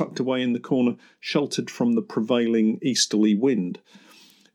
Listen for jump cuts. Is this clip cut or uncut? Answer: uncut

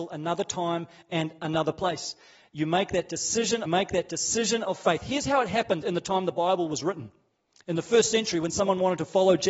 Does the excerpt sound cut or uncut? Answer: cut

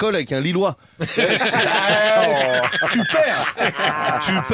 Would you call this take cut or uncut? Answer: uncut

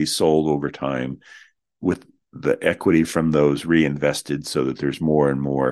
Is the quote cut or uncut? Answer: uncut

